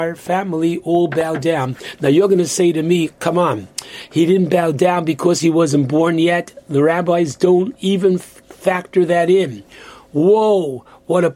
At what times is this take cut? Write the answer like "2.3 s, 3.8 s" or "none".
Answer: none